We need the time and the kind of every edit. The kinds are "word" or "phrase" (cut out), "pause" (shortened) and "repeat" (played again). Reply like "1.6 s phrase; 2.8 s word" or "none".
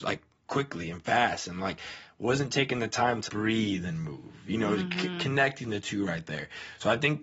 3.3 s word